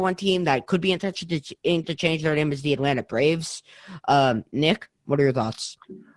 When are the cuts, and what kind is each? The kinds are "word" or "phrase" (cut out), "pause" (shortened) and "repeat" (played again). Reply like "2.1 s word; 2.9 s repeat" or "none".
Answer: 1.8 s word